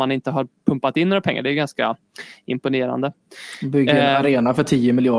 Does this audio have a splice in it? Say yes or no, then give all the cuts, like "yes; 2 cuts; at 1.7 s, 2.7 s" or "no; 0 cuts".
no; 0 cuts